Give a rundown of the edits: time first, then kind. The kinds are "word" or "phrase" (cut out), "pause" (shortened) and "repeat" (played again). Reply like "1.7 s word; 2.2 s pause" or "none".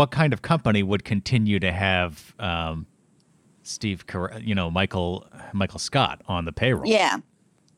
none